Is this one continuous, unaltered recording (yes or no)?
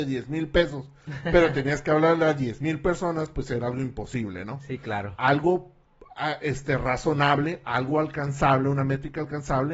yes